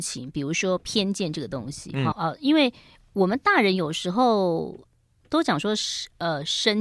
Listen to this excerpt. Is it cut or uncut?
cut